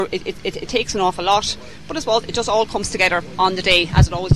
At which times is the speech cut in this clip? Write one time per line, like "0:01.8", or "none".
none